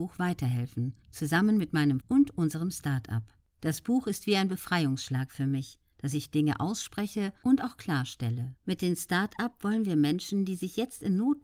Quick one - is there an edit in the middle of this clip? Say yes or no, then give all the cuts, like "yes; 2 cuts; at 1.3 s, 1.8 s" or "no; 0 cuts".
yes; 4 cuts; at 1.0 s, 2.0 s, 3.4 s, 8.6 s